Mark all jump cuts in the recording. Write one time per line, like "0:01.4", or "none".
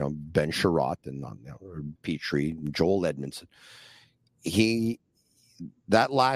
0:02.0